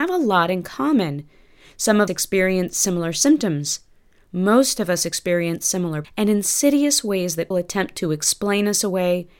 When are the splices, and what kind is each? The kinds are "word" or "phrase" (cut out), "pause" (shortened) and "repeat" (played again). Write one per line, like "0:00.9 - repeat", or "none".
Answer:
0:02.1 - word
0:06.0 - word
0:07.5 - word